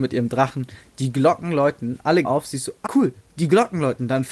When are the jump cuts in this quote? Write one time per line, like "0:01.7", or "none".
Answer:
0:02.2
0:02.9